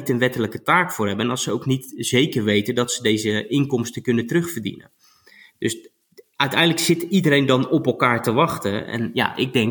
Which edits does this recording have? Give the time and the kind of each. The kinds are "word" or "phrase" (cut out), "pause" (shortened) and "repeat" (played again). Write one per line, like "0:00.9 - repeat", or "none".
none